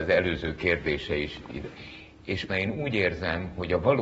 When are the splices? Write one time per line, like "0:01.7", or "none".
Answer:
0:02.5